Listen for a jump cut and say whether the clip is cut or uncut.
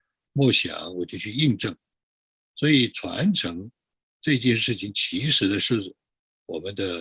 uncut